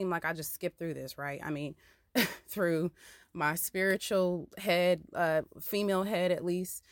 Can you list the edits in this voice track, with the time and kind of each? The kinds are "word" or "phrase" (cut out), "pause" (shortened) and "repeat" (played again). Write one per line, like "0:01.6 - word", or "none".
none